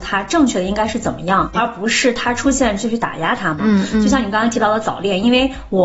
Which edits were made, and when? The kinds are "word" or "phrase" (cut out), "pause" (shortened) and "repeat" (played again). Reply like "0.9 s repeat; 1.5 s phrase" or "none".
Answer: 1.5 s word